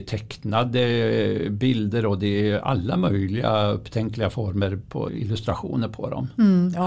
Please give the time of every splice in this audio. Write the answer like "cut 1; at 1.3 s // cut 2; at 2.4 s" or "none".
none